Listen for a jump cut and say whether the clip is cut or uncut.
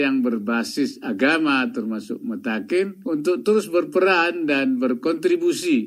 uncut